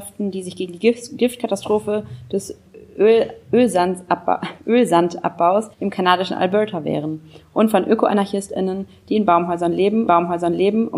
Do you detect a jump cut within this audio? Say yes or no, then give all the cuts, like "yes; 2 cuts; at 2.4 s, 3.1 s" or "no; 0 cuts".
yes; 2 cuts; at 5.7 s, 10.1 s